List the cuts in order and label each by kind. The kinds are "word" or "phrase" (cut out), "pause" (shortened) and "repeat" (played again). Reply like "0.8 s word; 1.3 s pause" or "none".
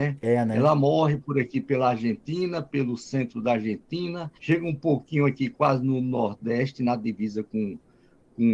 4.4 s pause

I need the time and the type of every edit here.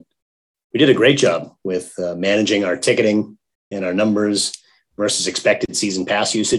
none

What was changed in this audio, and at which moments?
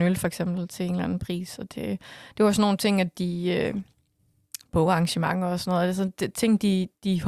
none

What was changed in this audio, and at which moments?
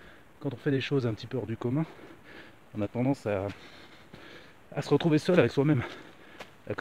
none

